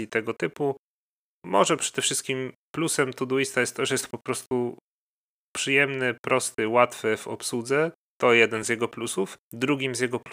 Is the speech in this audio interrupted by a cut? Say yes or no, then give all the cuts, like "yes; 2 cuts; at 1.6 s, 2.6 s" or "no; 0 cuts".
no; 0 cuts